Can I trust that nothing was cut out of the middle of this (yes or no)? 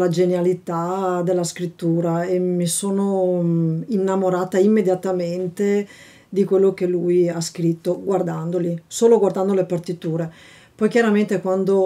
yes